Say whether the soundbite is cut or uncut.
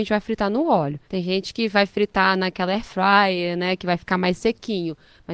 cut